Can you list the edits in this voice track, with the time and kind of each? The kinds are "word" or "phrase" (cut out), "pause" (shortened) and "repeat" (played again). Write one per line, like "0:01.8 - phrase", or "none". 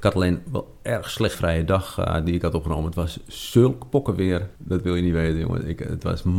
0:01.3 - phrase
0:04.6 - pause